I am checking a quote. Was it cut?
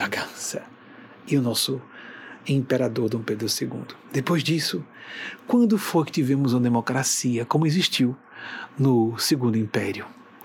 no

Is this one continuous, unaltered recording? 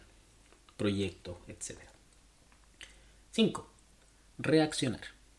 yes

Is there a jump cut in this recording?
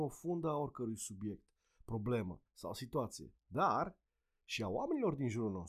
yes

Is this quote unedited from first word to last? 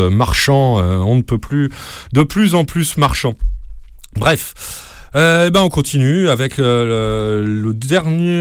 yes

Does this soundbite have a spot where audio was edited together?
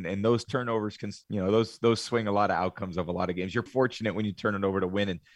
yes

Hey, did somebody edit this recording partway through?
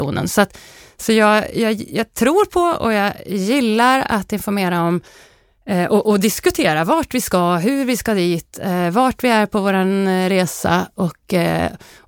no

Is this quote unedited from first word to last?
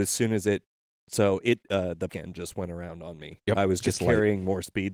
no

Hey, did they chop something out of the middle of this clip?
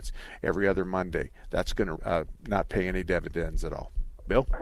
yes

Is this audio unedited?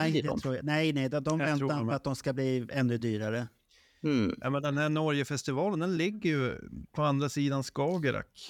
yes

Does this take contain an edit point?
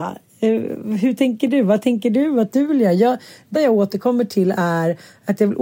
yes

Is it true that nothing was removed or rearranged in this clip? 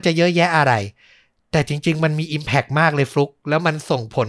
yes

